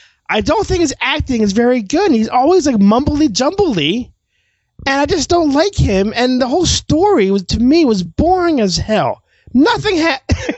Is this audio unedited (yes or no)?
yes